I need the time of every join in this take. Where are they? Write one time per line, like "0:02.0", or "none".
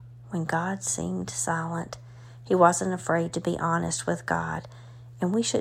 none